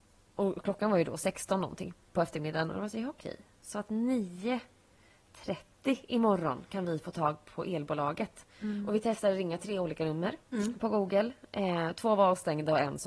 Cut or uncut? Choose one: cut